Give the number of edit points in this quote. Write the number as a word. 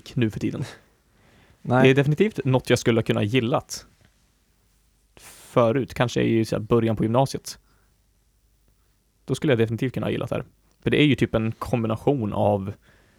zero